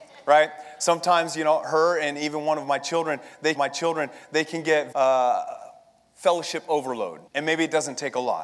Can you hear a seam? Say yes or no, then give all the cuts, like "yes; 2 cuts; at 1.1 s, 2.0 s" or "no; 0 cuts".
yes; 4 cuts; at 2.1 s, 3.6 s, 4.9 s, 7.3 s